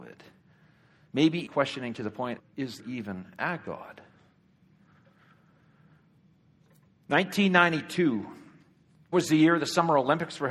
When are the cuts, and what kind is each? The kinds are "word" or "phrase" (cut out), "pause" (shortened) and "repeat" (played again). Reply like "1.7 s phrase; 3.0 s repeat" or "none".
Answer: 1.5 s word; 2.4 s word; 2.8 s word; 9.1 s word